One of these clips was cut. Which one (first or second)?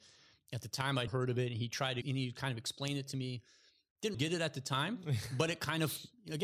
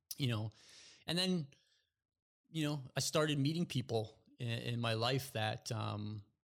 first